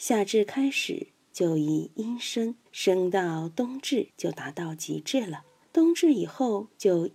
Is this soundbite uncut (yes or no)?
no